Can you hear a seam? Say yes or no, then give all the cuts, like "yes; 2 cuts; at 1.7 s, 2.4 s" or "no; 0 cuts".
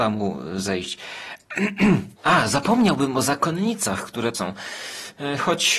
yes; 2 cuts; at 2.2 s, 4.3 s